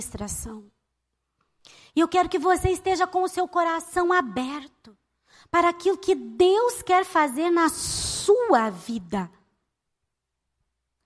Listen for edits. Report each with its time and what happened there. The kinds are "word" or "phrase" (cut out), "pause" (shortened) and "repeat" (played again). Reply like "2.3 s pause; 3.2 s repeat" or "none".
none